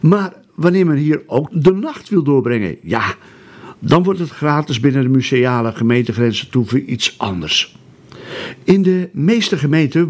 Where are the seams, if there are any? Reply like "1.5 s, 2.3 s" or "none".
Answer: 1.5 s